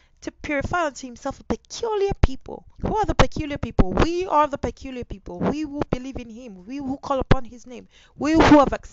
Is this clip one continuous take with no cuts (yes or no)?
no